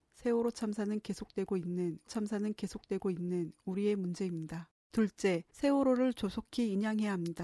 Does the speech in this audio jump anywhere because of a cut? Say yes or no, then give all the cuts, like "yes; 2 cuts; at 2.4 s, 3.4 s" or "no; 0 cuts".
yes; 2 cuts; at 2.1 s, 4.8 s